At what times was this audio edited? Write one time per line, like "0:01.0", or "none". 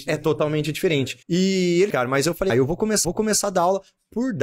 0:01.2
0:01.9
0:02.5
0:03.0

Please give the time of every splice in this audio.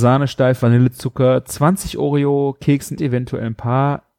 0:03.0

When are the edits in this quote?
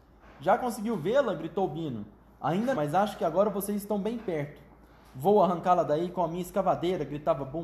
0:02.7

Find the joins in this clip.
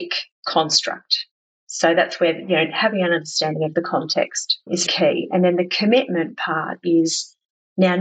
0:04.9

